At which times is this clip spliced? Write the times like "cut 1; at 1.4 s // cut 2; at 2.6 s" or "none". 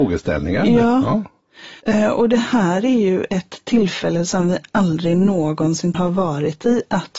cut 1; at 1.8 s // cut 2; at 5.9 s